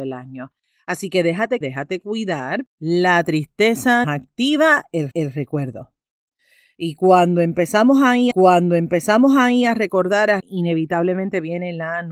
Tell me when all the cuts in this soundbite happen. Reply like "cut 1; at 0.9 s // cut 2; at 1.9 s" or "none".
cut 1; at 1.6 s // cut 2; at 2.7 s // cut 3; at 4.0 s // cut 4; at 5.1 s // cut 5; at 8.3 s // cut 6; at 10.4 s